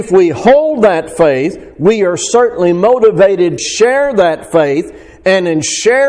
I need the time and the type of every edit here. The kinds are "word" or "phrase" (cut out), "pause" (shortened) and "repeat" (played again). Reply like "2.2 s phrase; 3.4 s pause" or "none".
3.6 s word